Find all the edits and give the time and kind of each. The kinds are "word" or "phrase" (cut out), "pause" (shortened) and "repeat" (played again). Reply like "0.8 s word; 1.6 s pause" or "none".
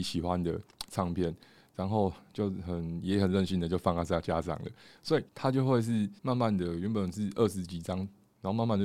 5.3 s pause; 6.2 s pause